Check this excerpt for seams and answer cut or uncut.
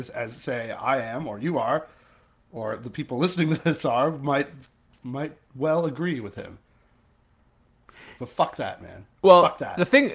uncut